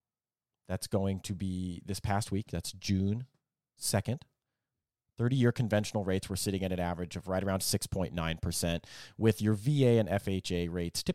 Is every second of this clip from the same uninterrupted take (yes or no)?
yes